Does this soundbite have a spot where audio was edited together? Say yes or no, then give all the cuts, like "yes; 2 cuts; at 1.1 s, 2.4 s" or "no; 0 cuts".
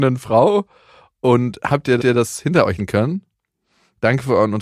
yes; 2 cuts; at 2.0 s, 2.8 s